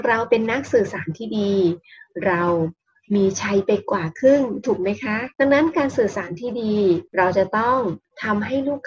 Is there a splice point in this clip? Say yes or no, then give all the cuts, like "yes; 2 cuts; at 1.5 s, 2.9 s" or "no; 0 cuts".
yes; 2 cuts; at 5.3 s, 7.1 s